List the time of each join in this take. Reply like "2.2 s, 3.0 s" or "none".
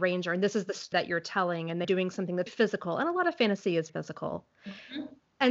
0.9 s, 1.8 s, 2.5 s, 3.9 s